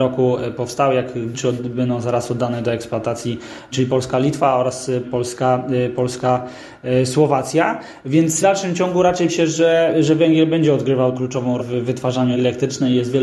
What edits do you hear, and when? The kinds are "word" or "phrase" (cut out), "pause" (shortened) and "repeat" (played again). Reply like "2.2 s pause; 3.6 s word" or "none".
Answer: 1.3 s word; 3.7 s word; 5.0 s word; 8.4 s word; 9.3 s word; 11.1 s word; 11.6 s word; 12.3 s word